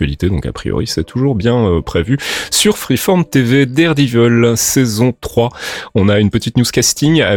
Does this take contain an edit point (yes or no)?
no